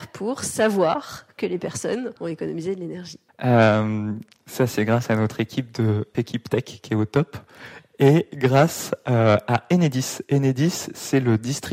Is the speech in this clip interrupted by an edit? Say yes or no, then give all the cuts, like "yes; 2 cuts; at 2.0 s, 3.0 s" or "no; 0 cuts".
yes; 2 cuts; at 2.2 s, 6.1 s